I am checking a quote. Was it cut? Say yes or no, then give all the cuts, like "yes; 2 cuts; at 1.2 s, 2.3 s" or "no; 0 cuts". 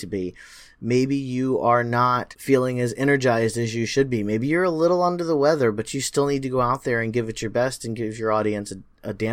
no; 0 cuts